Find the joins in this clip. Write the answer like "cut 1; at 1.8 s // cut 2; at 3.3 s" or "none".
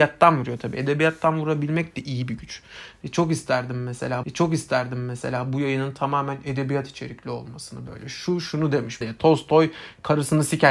cut 1; at 4.2 s // cut 2; at 9.0 s